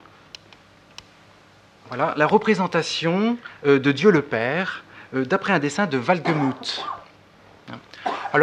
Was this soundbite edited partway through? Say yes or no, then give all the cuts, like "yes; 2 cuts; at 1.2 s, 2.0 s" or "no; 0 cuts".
no; 0 cuts